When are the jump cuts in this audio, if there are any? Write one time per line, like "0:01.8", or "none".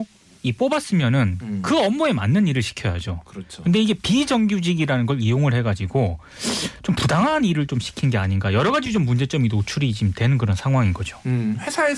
none